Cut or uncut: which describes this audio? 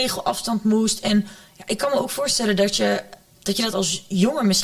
uncut